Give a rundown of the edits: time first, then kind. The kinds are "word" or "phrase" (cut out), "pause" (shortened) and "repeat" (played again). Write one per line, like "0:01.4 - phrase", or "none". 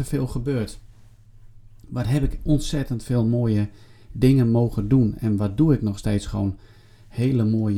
none